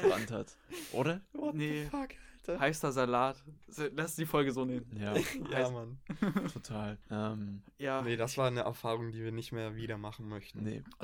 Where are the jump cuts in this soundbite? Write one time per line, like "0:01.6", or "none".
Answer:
0:07.0